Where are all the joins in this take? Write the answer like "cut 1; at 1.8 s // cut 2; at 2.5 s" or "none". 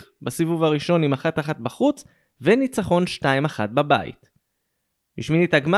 none